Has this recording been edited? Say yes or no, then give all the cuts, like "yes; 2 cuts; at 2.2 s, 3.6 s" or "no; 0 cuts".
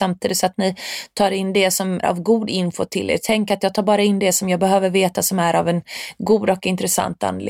yes; 1 cut; at 2.0 s